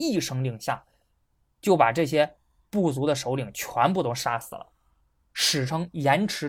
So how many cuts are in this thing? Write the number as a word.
zero